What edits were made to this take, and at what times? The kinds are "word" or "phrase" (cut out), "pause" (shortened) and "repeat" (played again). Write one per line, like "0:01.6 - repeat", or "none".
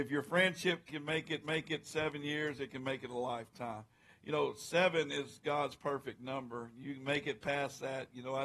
0:01.4 - repeat